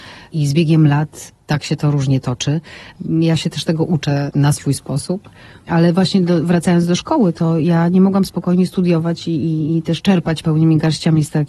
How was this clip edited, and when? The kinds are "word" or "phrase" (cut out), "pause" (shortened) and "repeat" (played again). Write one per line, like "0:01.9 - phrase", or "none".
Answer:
none